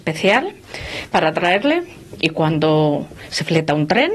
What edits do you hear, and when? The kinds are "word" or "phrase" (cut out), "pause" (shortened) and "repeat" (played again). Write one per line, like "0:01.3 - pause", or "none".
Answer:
none